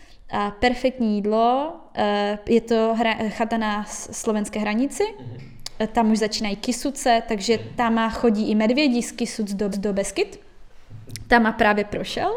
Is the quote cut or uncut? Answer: cut